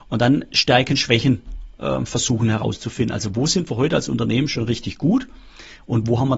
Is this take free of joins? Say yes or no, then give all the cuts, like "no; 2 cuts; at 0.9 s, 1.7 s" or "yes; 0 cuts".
yes; 0 cuts